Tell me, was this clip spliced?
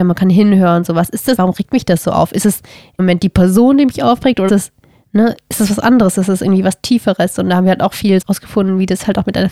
yes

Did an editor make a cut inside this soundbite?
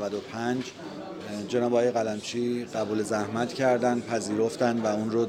no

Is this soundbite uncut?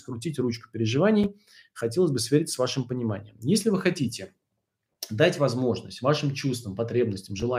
yes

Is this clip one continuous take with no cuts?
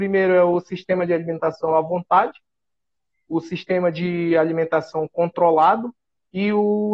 yes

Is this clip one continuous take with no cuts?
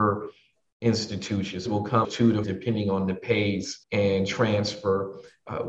no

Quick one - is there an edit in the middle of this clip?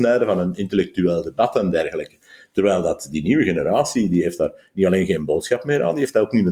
no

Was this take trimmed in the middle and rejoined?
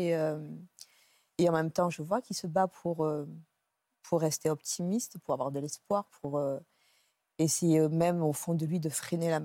no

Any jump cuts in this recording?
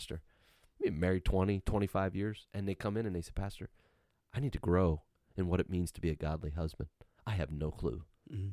no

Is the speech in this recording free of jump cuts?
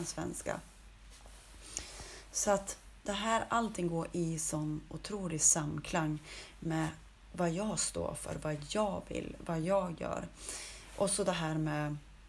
yes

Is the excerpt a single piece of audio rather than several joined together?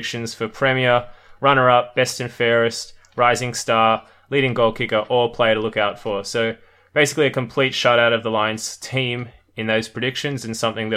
yes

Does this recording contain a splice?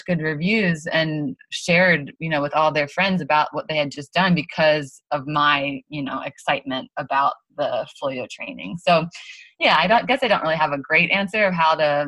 no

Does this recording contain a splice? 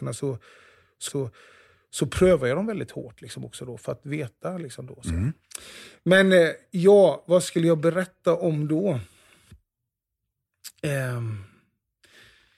yes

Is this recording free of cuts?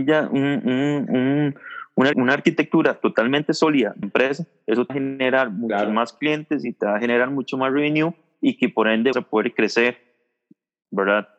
no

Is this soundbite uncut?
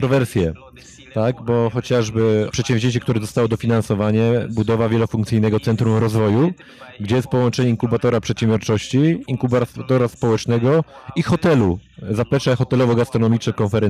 no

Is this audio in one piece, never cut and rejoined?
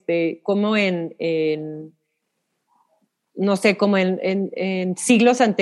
yes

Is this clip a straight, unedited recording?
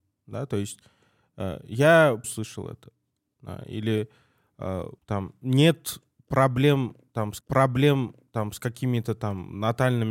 no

